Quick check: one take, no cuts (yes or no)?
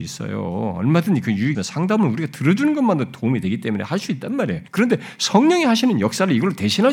no